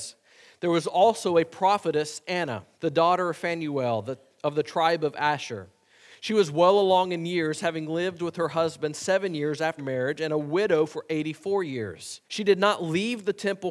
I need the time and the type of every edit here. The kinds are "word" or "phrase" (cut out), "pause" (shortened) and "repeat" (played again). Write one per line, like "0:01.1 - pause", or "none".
0:02.7 - pause
0:09.8 - word
0:12.3 - pause